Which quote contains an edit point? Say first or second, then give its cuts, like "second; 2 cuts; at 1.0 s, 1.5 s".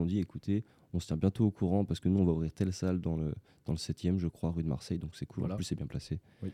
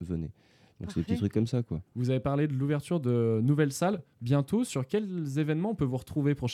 second; 1 cut; at 1.9 s